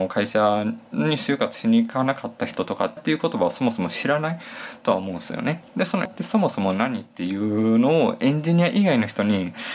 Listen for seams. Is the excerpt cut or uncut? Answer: cut